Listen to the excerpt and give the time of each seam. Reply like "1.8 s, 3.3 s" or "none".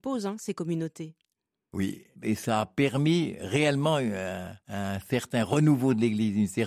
2.1 s, 4.6 s